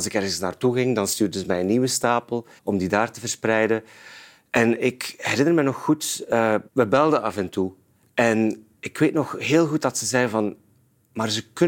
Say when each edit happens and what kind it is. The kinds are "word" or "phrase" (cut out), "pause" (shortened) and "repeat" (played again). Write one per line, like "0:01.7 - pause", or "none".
0:02.6 - pause
0:06.7 - pause
0:08.0 - pause